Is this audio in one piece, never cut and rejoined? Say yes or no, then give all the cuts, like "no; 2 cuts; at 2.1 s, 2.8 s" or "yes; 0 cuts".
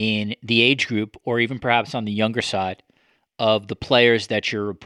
yes; 0 cuts